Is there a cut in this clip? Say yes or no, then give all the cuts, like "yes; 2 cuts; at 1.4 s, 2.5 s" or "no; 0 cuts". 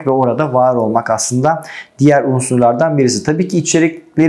no; 0 cuts